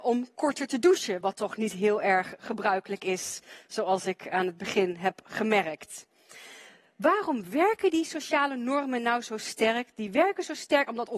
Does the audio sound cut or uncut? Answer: uncut